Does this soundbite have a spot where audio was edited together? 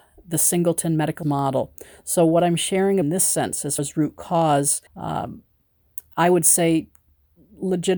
yes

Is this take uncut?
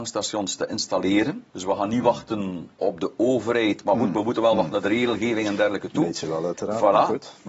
no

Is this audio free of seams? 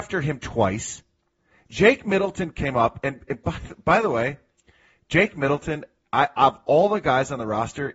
yes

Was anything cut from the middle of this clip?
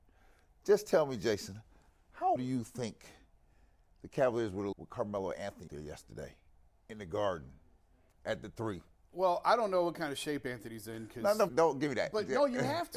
yes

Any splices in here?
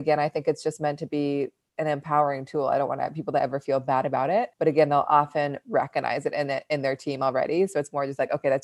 yes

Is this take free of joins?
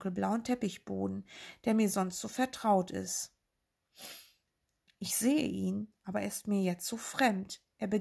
yes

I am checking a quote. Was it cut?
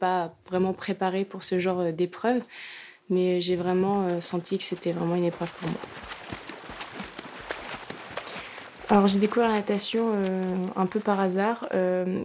no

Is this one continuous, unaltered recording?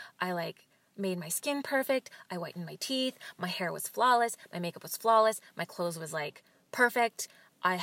yes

